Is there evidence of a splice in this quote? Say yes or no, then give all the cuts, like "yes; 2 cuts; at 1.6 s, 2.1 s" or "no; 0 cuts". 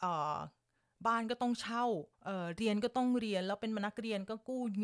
yes; 1 cut; at 2.1 s